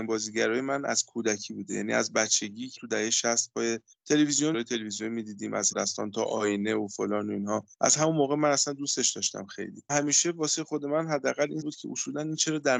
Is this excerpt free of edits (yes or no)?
no